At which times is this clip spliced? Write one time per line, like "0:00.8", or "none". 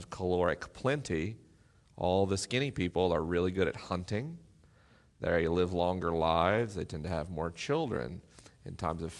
none

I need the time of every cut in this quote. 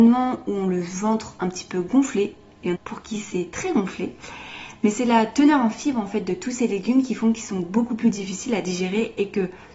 0:02.7

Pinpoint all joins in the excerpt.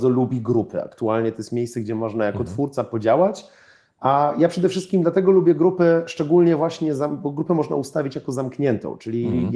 none

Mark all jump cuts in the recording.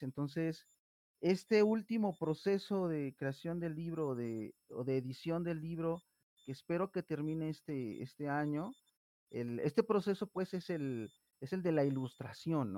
none

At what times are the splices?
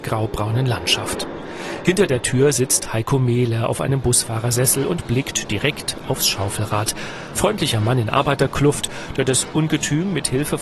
0:07.4

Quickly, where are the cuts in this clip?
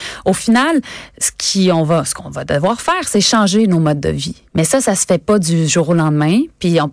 0:04.5

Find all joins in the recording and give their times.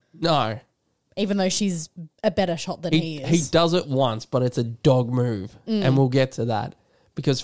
0:02.1

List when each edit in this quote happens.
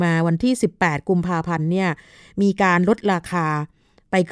none

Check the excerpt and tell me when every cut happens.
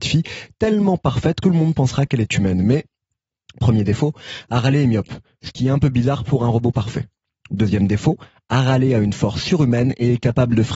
0:01.4

